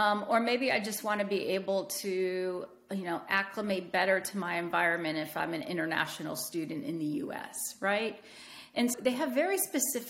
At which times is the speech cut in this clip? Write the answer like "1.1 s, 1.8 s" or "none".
8.9 s